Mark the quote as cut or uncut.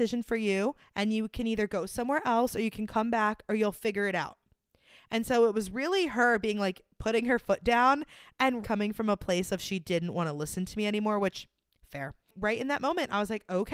cut